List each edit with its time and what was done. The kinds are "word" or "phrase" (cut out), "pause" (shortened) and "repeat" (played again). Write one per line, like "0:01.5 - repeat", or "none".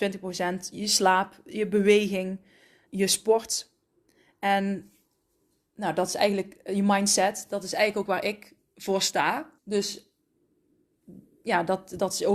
0:02.9 - word
0:08.1 - phrase
0:09.6 - pause